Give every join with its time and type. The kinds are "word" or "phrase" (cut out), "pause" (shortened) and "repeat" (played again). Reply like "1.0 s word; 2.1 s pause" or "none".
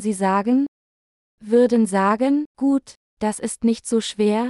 1.9 s word; 2.5 s pause

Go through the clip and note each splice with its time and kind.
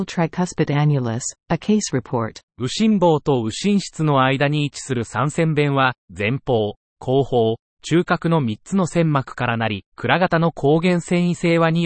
2.5 s pause; 6.0 s pause; 9.9 s pause

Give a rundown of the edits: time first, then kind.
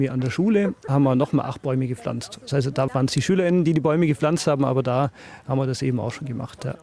2.9 s phrase

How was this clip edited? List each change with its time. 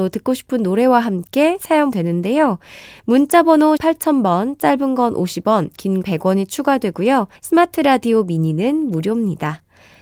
1.9 s word; 3.8 s word; 6.0 s word; 7.4 s pause

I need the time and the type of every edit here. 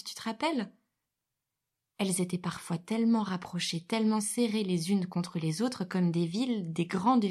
none

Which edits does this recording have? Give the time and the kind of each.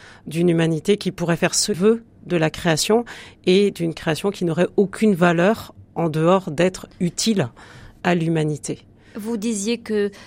1.7 s word; 5.9 s pause

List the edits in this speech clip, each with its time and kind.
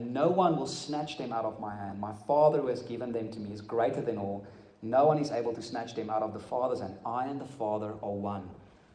none

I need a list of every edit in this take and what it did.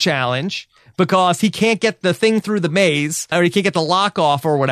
2.0 s word; 3.3 s word

